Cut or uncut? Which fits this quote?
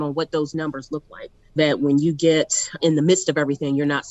cut